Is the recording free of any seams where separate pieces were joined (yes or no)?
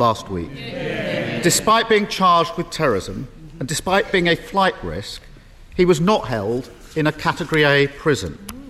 yes